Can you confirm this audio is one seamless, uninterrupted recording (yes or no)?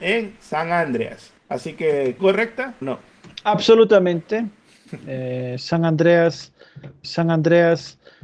no